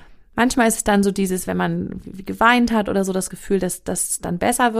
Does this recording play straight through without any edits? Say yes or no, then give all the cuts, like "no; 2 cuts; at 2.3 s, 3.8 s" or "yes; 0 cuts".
yes; 0 cuts